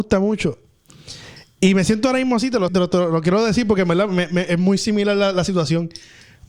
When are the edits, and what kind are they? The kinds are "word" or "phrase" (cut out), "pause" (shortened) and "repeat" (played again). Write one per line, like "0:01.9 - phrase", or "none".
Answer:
0:02.7 - word